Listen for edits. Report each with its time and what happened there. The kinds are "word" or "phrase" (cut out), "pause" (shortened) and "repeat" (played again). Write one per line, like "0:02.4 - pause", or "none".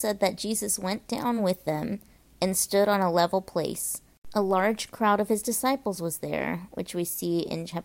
none